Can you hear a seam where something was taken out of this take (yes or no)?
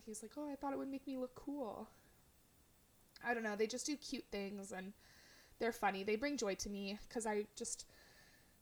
no